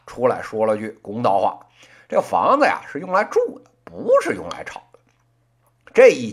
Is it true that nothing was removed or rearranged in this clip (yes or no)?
yes